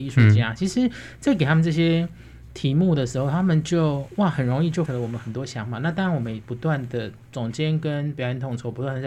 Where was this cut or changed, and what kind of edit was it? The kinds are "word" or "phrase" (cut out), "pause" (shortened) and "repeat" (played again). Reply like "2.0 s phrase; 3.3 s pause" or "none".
4.9 s word